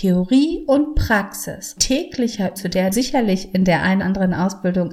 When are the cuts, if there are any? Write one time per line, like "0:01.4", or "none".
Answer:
0:01.8
0:02.6
0:02.9
0:04.0